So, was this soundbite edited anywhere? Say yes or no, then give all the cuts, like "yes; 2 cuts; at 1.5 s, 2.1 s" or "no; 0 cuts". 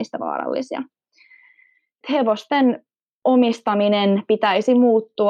no; 0 cuts